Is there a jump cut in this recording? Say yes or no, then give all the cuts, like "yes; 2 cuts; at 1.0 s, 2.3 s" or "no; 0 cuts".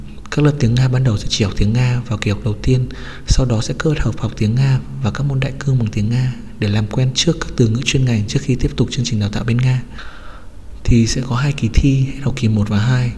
no; 0 cuts